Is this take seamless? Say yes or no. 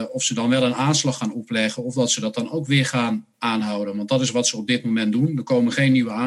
yes